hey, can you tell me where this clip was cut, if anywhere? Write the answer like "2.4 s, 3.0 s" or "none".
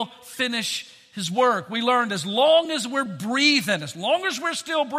none

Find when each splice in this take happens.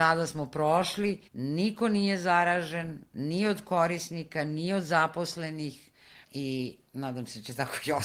1.3 s, 6.2 s

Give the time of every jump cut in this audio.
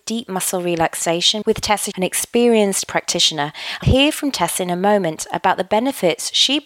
1.4 s, 1.9 s, 2.8 s, 3.8 s

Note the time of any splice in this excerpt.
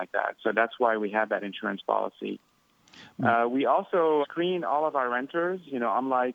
4.2 s

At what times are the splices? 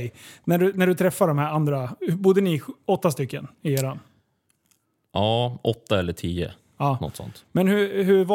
none

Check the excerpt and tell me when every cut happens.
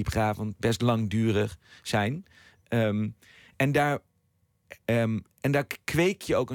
none

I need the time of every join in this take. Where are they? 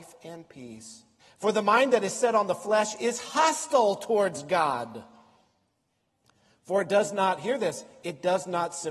1.2 s

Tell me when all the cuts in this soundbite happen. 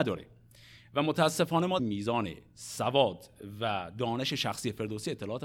1.8 s

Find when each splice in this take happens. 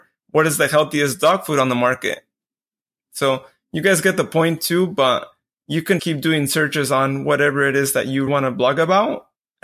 6.0 s, 8.3 s

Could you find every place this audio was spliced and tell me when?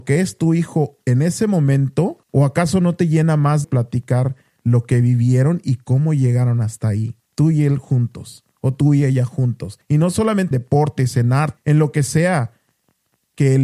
2.2 s, 3.6 s, 7.3 s, 9.8 s, 10.5 s, 11.6 s

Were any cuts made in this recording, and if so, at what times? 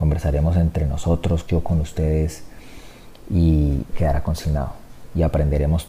1.4 s, 3.9 s

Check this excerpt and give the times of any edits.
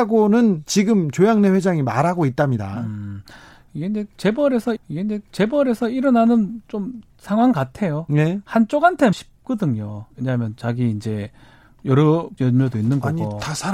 4.8 s, 7.1 s, 9.1 s, 10.1 s, 12.4 s

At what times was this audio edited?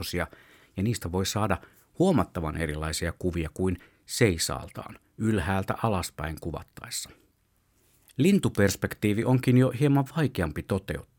none

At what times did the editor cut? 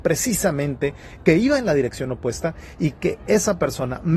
none

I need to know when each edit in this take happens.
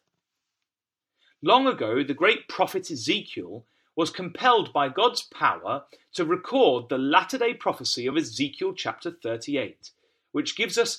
none

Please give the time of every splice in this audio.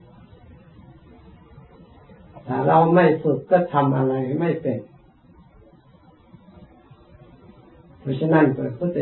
none

